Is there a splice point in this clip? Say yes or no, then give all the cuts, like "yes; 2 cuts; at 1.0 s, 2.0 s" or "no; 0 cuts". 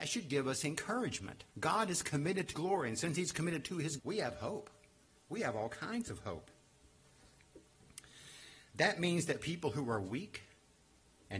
yes; 4 cuts; at 1.5 s, 2.5 s, 4.0 s, 5.0 s